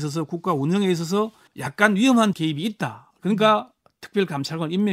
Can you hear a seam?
yes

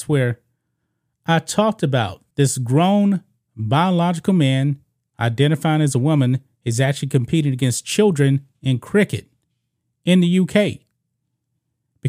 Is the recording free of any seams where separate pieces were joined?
no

